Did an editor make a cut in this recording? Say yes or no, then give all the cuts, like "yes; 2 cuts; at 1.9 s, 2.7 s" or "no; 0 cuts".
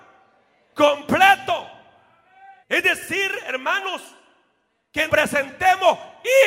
yes; 2 cuts; at 2.6 s, 5.1 s